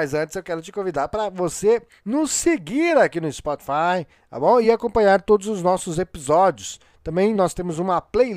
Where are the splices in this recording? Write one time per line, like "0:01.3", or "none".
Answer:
none

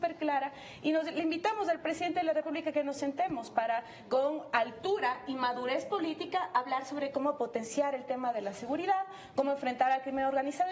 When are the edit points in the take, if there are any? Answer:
none

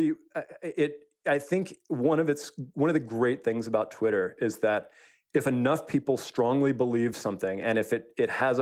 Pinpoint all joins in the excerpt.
none

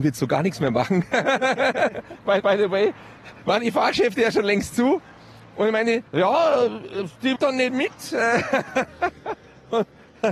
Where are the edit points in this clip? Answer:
0:02.4
0:06.1
0:07.4

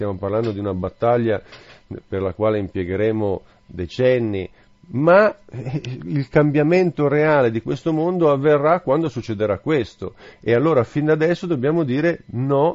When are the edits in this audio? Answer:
none

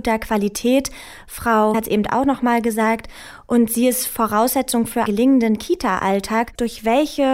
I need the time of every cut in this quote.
0:01.7
0:05.1

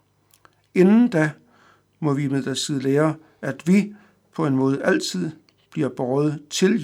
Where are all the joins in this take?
none

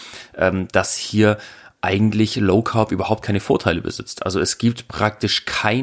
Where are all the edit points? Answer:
none

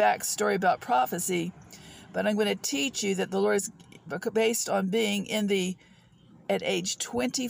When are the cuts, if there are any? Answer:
0:06.4

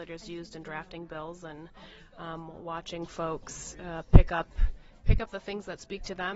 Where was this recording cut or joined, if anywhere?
none

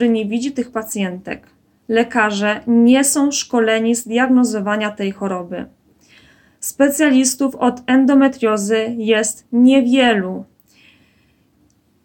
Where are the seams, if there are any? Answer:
none

